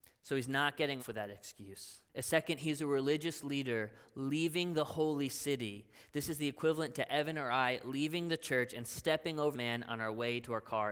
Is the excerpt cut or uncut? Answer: cut